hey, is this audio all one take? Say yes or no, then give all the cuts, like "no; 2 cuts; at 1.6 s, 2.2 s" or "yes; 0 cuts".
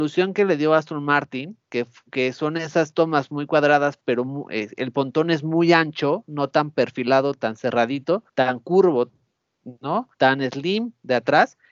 no; 3 cuts; at 1.6 s, 8.3 s, 10.1 s